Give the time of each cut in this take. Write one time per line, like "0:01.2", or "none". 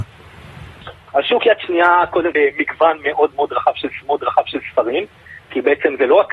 0:02.3
0:04.0